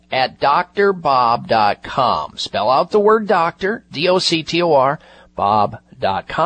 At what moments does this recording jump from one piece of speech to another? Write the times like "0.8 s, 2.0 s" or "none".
none